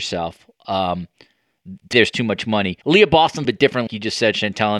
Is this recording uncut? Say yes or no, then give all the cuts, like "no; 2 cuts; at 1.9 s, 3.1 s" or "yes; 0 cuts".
no; 4 cuts; at 1.9 s, 2.8 s, 3.4 s, 3.9 s